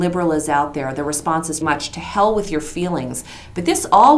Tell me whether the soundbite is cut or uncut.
cut